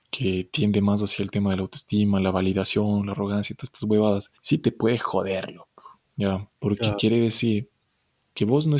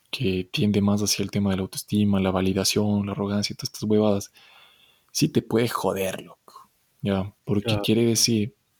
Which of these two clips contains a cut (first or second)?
first